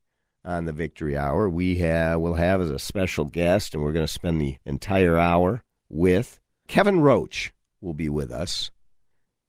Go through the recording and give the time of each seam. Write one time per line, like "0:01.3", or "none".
0:04.6
0:06.7